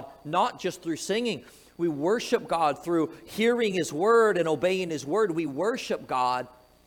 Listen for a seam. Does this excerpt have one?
no; 0 cuts

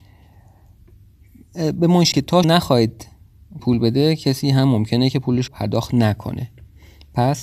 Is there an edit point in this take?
yes; 4 cuts; at 2.1 s, 2.4 s, 3.6 s, 5.5 s

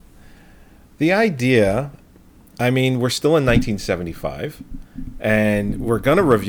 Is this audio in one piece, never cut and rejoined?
yes; 0 cuts

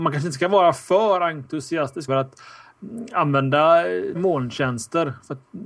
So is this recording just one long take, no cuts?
no; 2 cuts; at 2.1 s, 4.1 s

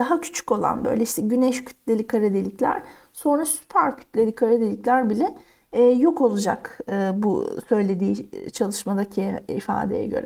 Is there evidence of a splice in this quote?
no; 0 cuts

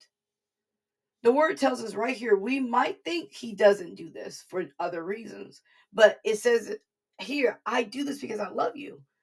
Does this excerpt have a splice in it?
no; 0 cuts

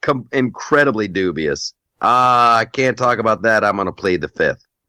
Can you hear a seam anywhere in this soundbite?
no; 0 cuts

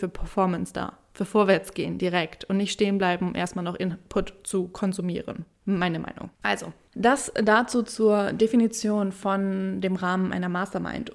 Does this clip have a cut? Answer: yes; 1 cut; at 6.3 s

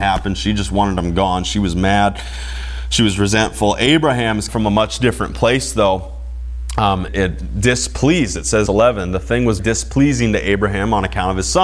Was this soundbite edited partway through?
yes; 4 cuts; at 4.5 s, 7.1 s, 8.7 s, 9.6 s

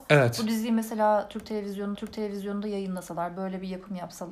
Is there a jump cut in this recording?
yes; 1 cut; at 1.9 s

